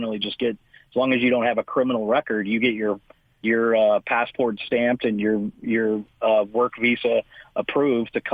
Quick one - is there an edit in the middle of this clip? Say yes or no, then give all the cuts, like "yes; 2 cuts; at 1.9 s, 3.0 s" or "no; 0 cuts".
no; 0 cuts